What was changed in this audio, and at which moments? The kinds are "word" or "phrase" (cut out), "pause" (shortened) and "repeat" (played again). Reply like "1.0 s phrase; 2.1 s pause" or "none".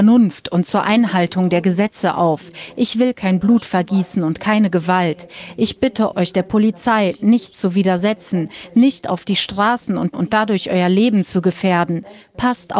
6.1 s word; 10.1 s phrase